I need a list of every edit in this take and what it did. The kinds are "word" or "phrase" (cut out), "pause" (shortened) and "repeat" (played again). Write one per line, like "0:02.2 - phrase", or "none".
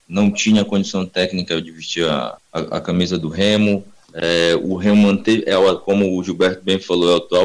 none